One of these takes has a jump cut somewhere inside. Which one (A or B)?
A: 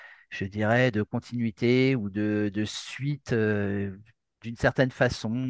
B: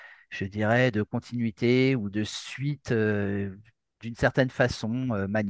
B